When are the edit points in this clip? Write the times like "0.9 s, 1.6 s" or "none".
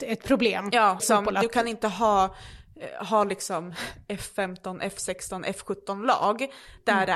1.0 s